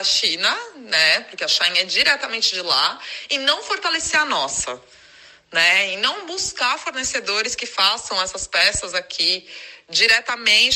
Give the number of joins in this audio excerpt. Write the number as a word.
zero